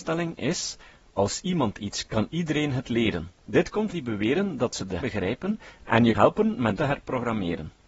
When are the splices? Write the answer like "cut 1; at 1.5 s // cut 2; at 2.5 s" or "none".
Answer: cut 1; at 2.1 s // cut 2; at 3.4 s // cut 3; at 3.9 s // cut 4; at 5.0 s // cut 5; at 6.1 s // cut 6; at 6.7 s

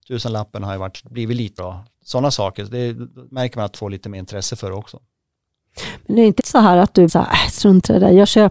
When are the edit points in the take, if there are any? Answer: cut 1; at 1.6 s // cut 2; at 3.7 s // cut 3; at 6.4 s // cut 4; at 7.1 s

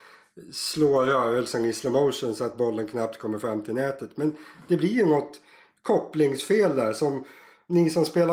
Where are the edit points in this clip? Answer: none

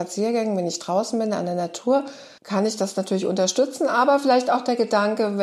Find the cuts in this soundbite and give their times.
cut 1; at 2.4 s

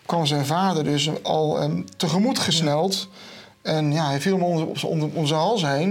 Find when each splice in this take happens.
none

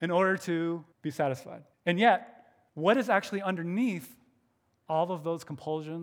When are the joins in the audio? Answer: cut 1; at 0.9 s // cut 2; at 1.7 s // cut 3; at 2.7 s

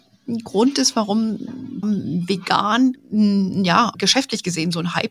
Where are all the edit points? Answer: cut 1; at 1.8 s // cut 2; at 3.9 s

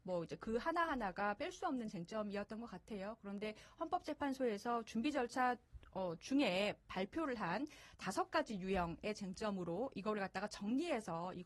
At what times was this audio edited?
none

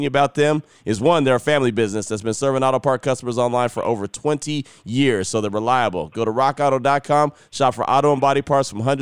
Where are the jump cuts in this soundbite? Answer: none

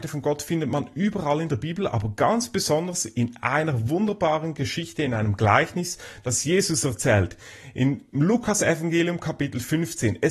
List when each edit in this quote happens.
none

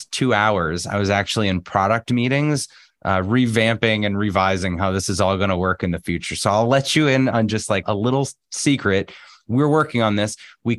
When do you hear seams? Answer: cut 1; at 7.8 s

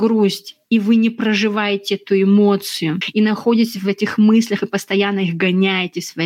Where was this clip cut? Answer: none

